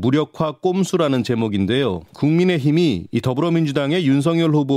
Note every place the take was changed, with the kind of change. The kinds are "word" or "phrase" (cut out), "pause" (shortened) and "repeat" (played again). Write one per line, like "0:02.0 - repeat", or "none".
0:02.1 - pause